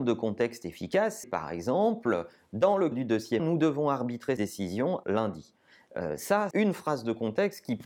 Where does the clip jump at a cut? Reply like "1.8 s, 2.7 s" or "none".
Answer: 1.2 s, 2.9 s, 3.4 s, 4.4 s, 5.0 s, 6.5 s